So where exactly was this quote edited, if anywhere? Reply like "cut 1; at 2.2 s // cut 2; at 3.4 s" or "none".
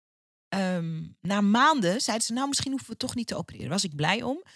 none